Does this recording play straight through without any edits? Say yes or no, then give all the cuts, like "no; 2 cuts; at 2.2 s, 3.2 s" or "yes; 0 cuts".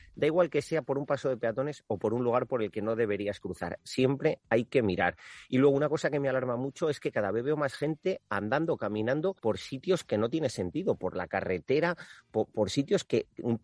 no; 2 cuts; at 3.8 s, 9.4 s